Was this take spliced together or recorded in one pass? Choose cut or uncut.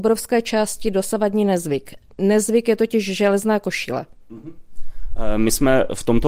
uncut